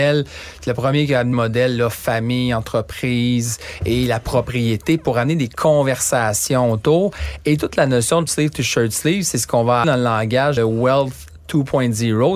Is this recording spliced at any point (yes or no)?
yes